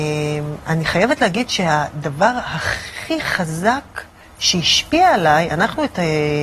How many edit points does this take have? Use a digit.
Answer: 0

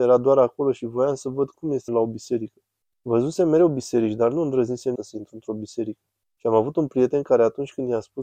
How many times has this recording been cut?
4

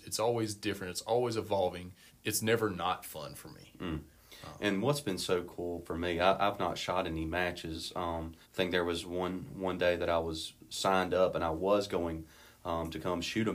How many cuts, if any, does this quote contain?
2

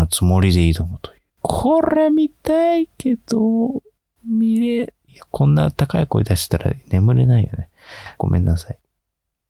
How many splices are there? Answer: 1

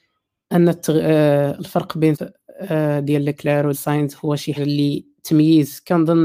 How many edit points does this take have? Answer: 3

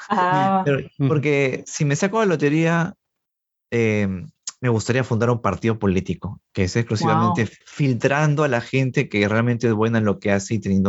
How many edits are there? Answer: 1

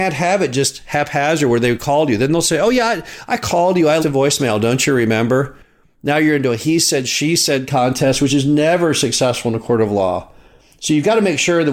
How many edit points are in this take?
1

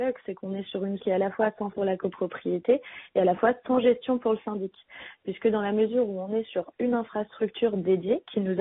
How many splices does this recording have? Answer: 2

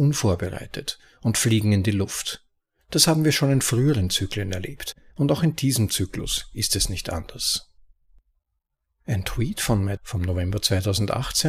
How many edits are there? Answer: 1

